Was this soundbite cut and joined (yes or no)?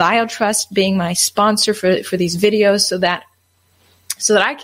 no